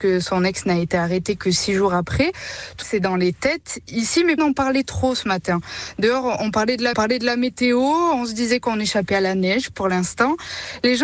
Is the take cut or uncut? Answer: cut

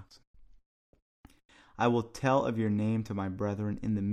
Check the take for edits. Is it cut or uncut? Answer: uncut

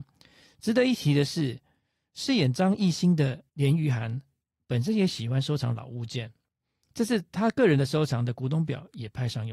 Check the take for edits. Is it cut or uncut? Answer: cut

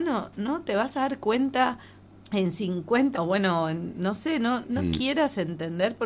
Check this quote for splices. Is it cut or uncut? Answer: cut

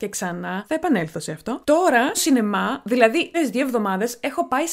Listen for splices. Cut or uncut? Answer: cut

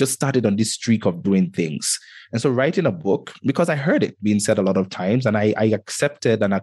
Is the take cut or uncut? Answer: uncut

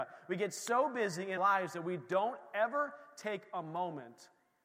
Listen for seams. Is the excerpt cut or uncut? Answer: cut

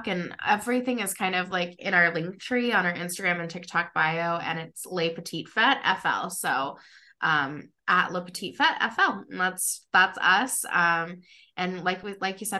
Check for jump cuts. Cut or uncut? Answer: uncut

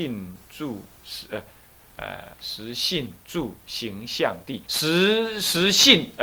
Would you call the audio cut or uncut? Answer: cut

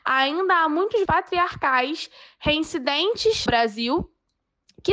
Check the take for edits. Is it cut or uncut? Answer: cut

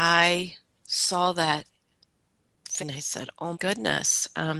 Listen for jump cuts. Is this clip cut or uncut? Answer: cut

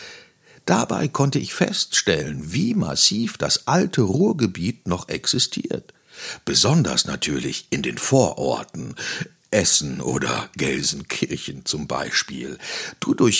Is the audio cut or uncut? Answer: uncut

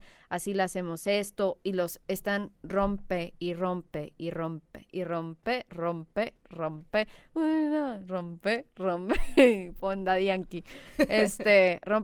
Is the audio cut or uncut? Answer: uncut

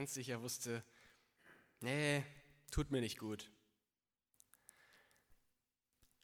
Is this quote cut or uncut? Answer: uncut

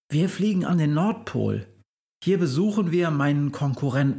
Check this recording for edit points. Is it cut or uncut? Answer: uncut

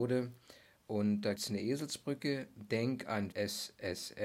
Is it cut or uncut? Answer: cut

